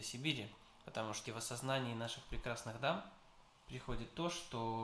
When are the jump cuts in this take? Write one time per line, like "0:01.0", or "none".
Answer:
0:01.3